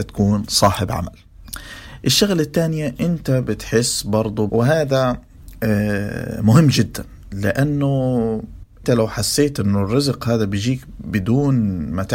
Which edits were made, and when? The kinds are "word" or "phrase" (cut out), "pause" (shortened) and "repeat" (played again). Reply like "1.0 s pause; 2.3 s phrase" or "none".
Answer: 4.5 s phrase; 8.8 s word